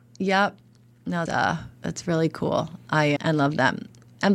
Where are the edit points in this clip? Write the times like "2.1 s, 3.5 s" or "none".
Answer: 1.3 s, 1.7 s, 3.2 s